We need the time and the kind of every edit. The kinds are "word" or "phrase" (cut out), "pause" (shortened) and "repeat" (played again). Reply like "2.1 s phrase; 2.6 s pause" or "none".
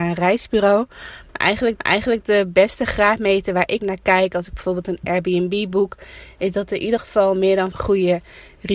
1.8 s repeat; 3.8 s word; 7.7 s word